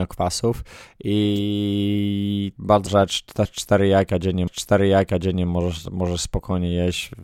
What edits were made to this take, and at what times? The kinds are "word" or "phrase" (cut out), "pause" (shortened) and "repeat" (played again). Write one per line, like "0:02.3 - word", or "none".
0:02.6 - word
0:02.9 - word
0:04.5 - repeat